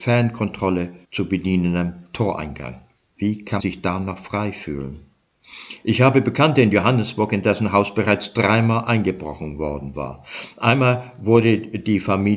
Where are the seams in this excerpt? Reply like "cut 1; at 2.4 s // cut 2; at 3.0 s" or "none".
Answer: cut 1; at 1.0 s // cut 2; at 3.0 s // cut 3; at 3.6 s